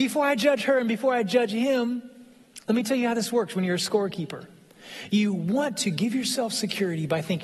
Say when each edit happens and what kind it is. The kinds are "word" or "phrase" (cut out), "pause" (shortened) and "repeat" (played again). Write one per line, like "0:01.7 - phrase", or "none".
none